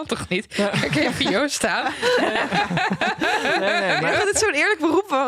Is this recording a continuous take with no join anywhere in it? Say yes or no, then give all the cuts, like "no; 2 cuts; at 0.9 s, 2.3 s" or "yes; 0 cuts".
yes; 0 cuts